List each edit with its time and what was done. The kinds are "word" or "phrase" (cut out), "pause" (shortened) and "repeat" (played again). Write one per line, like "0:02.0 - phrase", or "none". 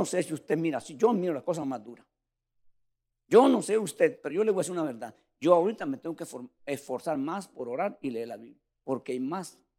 none